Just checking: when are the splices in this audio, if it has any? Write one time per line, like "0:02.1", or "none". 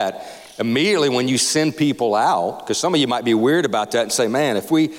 none